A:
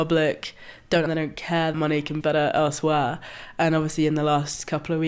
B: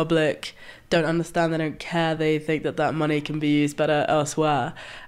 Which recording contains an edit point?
A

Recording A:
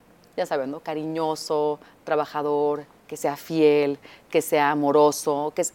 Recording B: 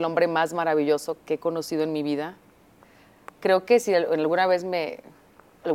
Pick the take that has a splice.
B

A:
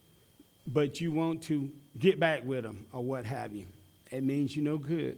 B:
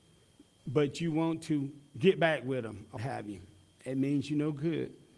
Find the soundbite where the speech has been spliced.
B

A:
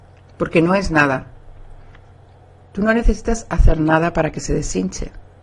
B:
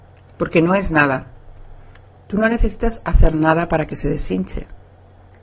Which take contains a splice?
B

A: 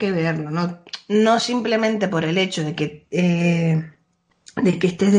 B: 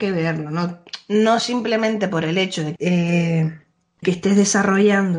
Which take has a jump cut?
B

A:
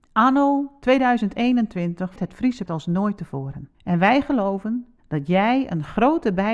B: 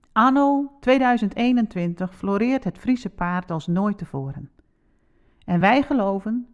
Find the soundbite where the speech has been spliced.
A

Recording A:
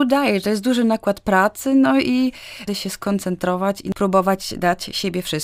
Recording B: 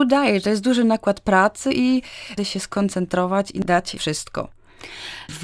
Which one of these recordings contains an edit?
B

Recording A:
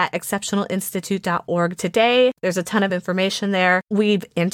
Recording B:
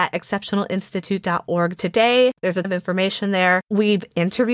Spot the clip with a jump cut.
B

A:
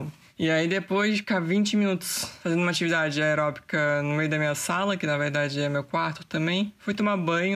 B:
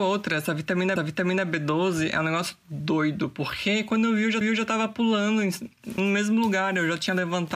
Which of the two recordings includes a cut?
B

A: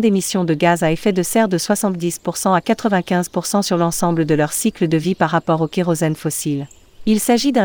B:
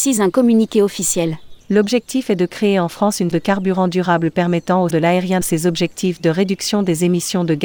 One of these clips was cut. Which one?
B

